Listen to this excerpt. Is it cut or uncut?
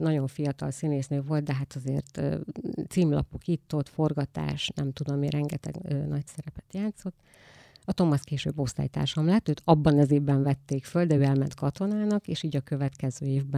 uncut